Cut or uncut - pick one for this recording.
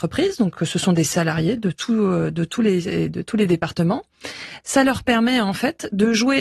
uncut